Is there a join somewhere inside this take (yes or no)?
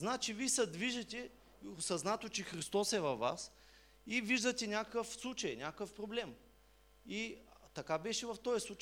no